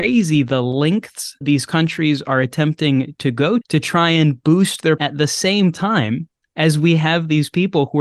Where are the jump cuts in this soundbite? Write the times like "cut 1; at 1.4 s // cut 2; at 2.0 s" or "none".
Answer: cut 1; at 1.4 s // cut 2; at 3.6 s // cut 3; at 5.0 s